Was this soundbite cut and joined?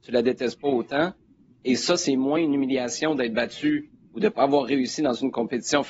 no; 0 cuts

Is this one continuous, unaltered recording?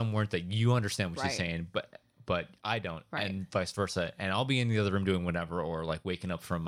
yes; 0 cuts

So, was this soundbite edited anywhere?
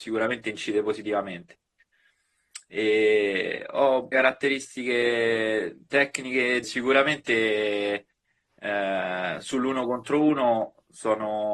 yes; 2 cuts; at 4.1 s, 6.6 s

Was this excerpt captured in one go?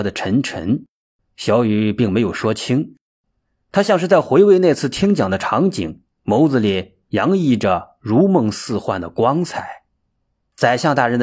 yes; 0 cuts

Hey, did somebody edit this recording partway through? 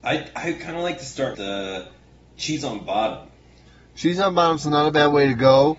yes; 1 cut; at 1.3 s

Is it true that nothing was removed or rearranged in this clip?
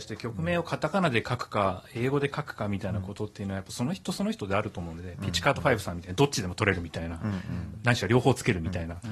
yes; 0 cuts

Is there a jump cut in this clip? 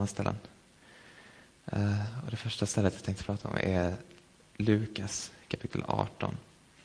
no; 0 cuts

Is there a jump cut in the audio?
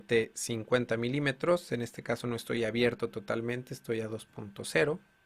no; 0 cuts

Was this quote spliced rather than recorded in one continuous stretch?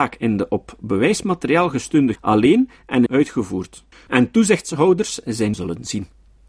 yes; 4 cuts; at 2.2 s, 3.1 s, 3.9 s, 5.5 s

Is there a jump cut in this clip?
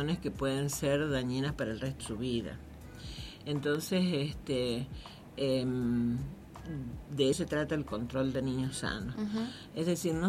yes; 2 cuts; at 2.0 s, 7.3 s

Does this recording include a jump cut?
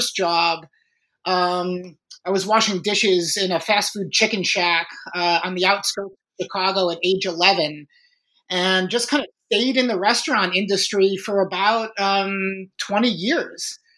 no; 0 cuts

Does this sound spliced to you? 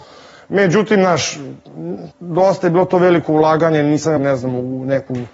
yes; 2 cuts; at 2.1 s, 4.2 s

